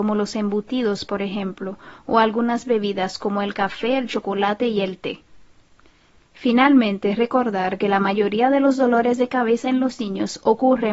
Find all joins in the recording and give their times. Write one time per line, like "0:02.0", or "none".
none